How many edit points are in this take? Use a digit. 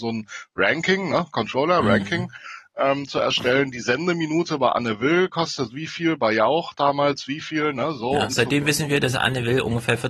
0